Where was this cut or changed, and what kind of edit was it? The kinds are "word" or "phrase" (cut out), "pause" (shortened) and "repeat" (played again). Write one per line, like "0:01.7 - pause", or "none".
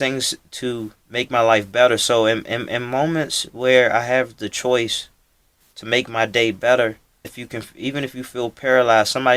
0:01.0 - pause
0:07.2 - word

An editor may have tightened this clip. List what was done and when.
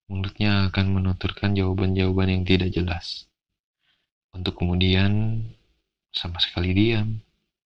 none

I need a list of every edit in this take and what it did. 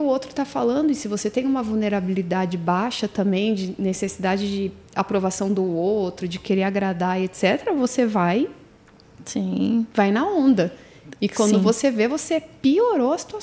none

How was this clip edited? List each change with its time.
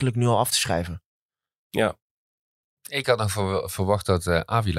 0:03.0 - word

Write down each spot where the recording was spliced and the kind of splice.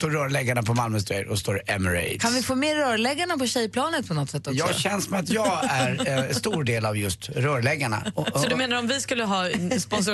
none

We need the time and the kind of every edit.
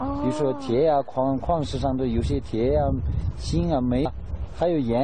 0:04.1 - word

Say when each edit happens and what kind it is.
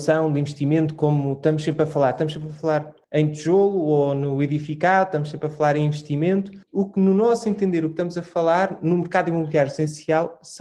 0:03.0 - pause
0:06.6 - pause

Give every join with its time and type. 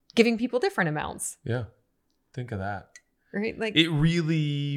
none

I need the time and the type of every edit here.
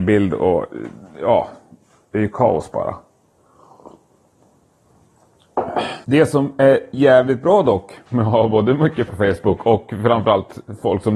0:06.0 - pause
0:08.0 - pause
0:09.1 - word

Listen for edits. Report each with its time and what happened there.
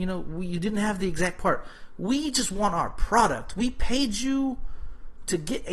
none

